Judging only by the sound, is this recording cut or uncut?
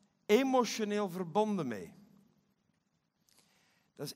uncut